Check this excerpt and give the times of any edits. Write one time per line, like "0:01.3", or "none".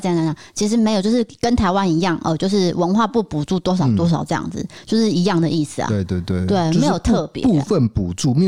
none